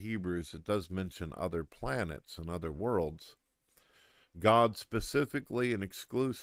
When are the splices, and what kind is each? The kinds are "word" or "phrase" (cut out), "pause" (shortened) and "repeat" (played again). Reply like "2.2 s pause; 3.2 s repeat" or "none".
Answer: none